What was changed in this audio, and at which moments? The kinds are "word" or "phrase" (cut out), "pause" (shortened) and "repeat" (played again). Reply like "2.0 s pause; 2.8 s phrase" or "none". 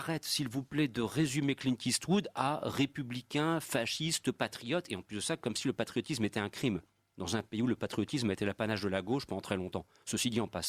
none